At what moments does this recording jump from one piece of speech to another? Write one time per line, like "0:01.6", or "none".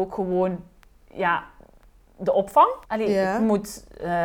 0:02.8